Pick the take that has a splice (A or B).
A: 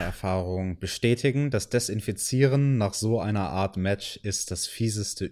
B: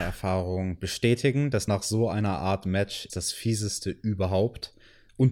B